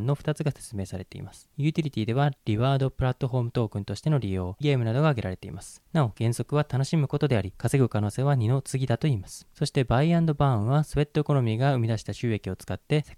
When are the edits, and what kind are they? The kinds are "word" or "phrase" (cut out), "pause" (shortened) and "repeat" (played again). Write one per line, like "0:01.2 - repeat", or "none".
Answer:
0:04.6 - word